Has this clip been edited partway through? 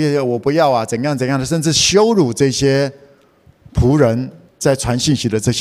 no; 0 cuts

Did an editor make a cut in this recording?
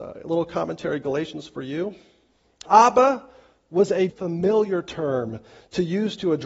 yes; 2 cuts; at 2.7 s, 4.1 s

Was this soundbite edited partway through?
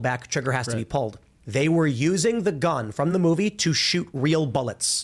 no; 0 cuts

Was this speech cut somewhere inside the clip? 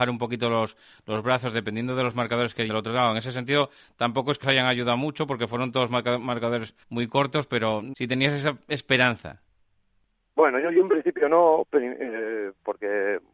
yes; 4 cuts; at 2.7 s, 4.4 s, 6.8 s, 7.9 s

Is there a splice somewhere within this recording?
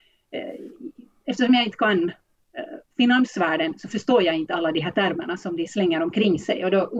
no; 0 cuts

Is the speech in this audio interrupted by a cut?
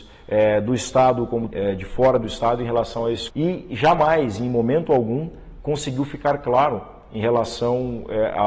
yes; 2 cuts; at 1.5 s, 3.3 s

